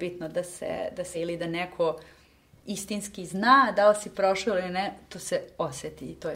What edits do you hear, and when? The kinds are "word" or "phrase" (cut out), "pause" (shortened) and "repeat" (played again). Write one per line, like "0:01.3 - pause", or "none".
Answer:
0:01.1 - word